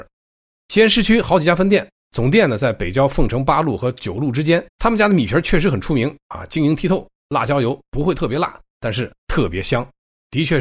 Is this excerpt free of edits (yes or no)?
no